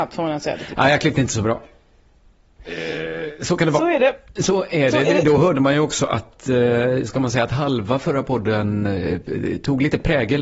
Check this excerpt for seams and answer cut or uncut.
uncut